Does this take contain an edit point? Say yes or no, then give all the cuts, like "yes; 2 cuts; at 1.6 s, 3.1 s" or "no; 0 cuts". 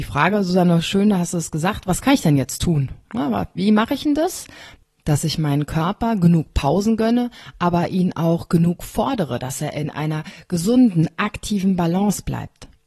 no; 0 cuts